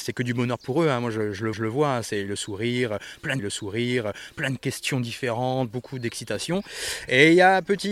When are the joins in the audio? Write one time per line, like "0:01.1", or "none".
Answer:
0:01.5
0:03.4

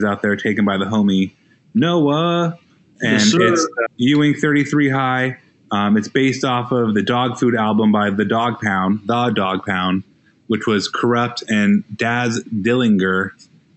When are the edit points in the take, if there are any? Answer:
0:03.9

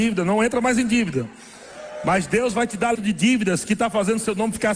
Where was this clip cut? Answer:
0:02.9

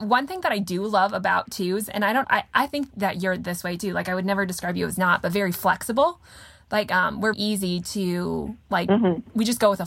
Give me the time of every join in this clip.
0:02.2
0:07.3

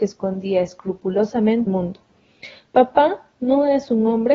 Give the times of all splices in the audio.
0:01.7

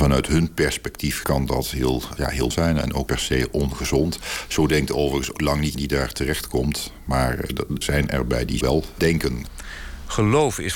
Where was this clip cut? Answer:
0:01.2
0:02.2
0:02.5
0:03.1
0:05.3
0:05.7
0:07.8
0:08.6
0:09.0

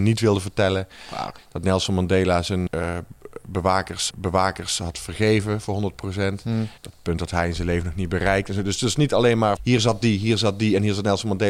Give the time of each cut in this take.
0:01.4
0:02.7
0:04.1
0:06.8
0:09.6

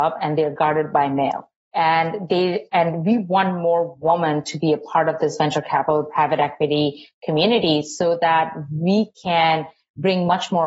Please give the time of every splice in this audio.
none

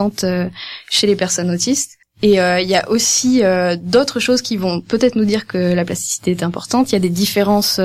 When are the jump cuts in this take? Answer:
0:02.0

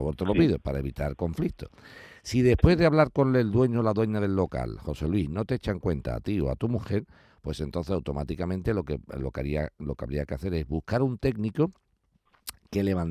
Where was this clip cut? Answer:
none

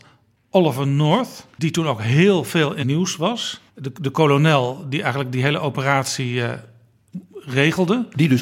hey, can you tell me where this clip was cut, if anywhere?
0:01.5
0:02.8
0:03.7

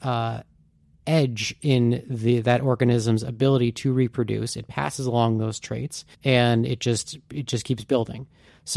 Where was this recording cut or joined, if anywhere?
0:06.1

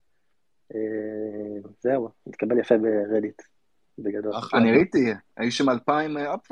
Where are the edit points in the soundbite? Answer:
none

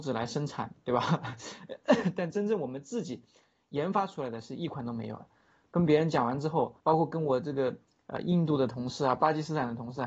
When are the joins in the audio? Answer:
0:06.8

